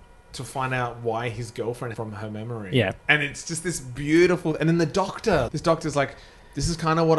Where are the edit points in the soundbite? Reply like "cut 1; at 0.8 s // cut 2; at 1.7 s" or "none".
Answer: cut 1; at 1.9 s // cut 2; at 3.0 s // cut 3; at 5.5 s